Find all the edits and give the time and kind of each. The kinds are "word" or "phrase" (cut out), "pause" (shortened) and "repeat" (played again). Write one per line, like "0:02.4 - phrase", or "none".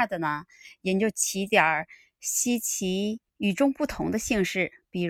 0:03.3 - pause